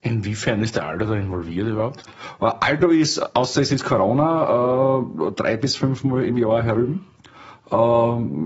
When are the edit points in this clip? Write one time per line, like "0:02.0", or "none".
none